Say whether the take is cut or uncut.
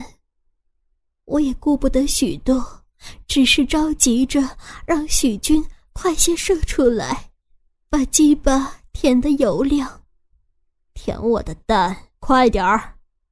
cut